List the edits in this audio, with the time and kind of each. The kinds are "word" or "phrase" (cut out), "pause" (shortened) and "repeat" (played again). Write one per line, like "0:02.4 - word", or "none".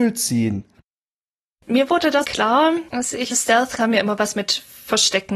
0:02.2 - phrase
0:02.9 - pause
0:03.3 - phrase
0:03.8 - word